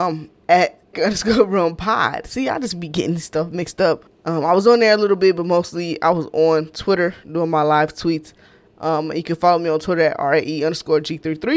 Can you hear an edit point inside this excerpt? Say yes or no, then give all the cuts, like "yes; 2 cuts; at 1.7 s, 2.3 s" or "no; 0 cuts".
yes; 2 cuts; at 0.9 s, 4.1 s